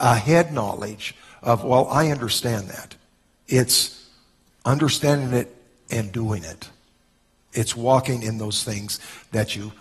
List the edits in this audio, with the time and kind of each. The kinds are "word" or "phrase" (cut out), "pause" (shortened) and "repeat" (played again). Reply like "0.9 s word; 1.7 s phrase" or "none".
none